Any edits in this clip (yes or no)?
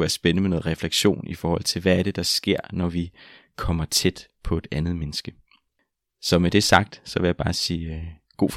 no